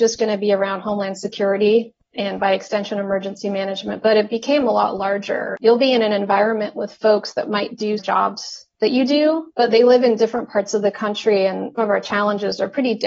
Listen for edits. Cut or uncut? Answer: cut